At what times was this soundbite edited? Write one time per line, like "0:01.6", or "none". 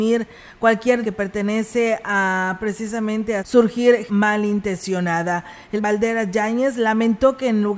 0:01.0
0:03.4
0:04.1
0:05.8